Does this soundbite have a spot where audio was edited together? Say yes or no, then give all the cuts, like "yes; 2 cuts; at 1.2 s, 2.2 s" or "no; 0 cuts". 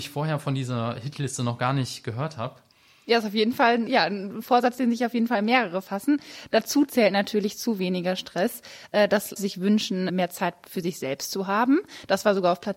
yes; 3 cuts; at 3.9 s, 9.4 s, 10.1 s